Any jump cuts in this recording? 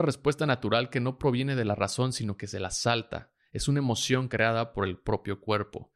no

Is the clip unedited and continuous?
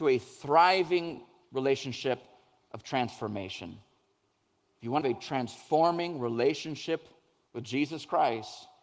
no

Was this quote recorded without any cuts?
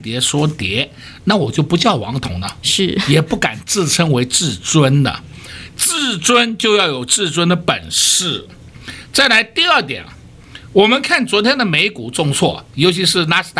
yes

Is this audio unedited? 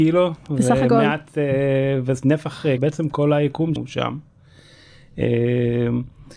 no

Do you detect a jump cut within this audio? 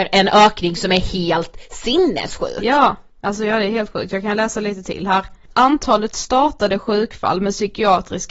no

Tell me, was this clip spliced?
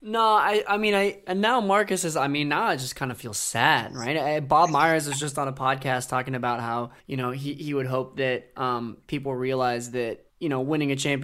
yes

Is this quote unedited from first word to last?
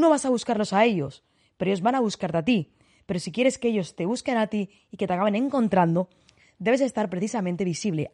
yes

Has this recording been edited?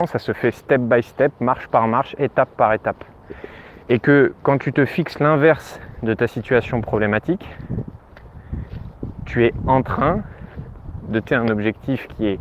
yes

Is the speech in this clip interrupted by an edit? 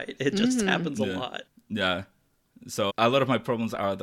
yes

